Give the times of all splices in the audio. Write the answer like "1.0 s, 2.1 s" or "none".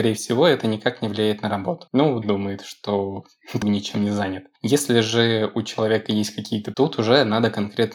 2.2 s, 3.6 s, 6.7 s

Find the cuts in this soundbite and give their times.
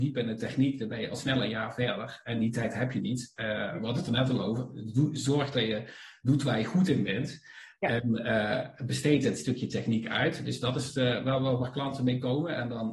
none

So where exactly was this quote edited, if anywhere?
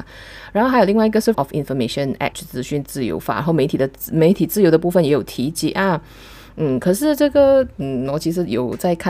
1.3 s, 2.3 s

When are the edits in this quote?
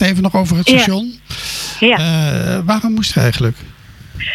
3.1 s

